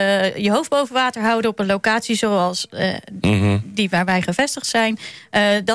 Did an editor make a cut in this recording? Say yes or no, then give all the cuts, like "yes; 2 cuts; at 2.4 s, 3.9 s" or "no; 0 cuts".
no; 0 cuts